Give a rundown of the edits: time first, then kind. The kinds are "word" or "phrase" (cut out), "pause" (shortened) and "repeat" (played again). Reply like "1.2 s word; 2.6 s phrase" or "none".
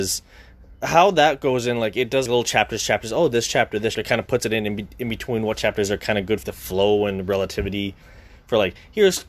2.3 s word; 3.9 s word; 6.4 s word